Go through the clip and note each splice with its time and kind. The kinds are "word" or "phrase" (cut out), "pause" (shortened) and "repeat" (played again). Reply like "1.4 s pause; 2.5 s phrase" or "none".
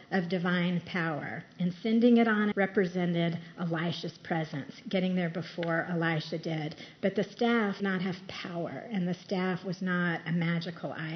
2.5 s word; 7.8 s word